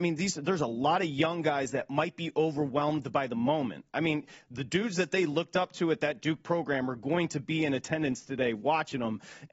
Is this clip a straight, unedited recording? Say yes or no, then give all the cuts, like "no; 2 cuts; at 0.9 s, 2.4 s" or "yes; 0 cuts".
yes; 0 cuts